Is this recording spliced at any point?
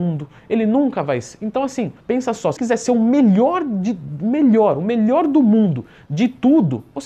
yes; 2 cuts; at 2.0 s, 2.6 s

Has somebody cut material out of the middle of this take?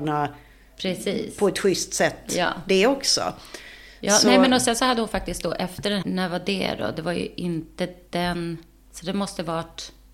yes; 1 cut; at 6.0 s

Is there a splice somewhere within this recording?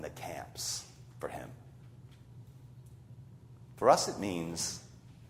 no; 0 cuts

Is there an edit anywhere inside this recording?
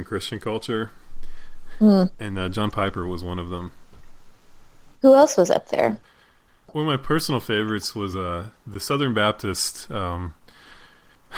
no; 0 cuts

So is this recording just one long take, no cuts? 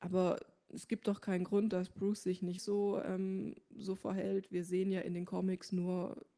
no; 1 cut; at 2.6 s

